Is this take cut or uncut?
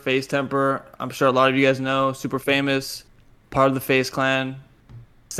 uncut